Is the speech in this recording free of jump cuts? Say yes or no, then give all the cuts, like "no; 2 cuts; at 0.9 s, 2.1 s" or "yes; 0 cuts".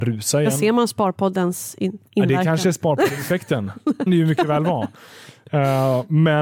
no; 2 cuts; at 2.1 s, 4.1 s